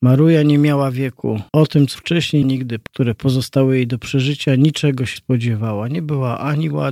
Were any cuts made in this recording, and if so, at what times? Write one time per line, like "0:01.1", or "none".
0:01.5
0:02.0
0:02.4
0:02.9
0:05.2